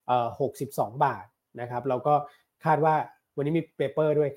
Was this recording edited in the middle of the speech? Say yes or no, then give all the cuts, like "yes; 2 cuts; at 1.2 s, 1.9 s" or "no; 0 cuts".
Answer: no; 0 cuts